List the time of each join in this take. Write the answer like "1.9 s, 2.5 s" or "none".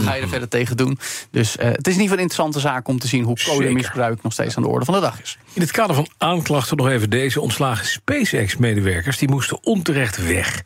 none